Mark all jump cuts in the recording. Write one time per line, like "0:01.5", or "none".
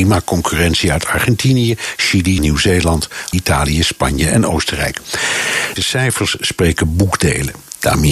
0:02.4
0:03.3
0:05.8